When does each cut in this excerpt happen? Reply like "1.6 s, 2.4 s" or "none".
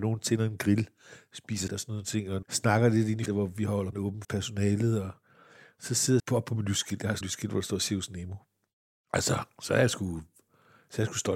1.7 s, 2.4 s, 3.3 s, 3.9 s, 4.2 s, 6.2 s, 7.2 s

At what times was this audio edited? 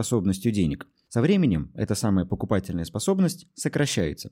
none

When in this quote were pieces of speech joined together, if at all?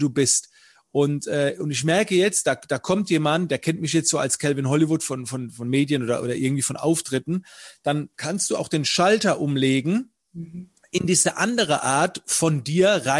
8.1 s

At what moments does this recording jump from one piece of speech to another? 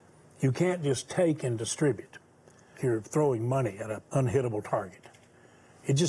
2.8 s, 4.0 s

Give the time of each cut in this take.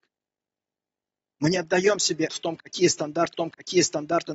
2.3 s, 3.3 s

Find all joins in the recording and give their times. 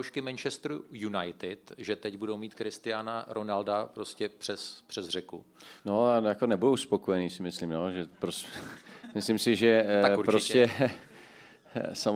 5.8 s

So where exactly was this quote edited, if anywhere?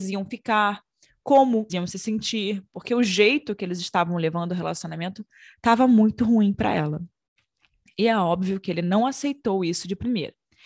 1.7 s

